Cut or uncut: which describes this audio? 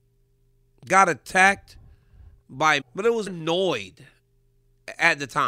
cut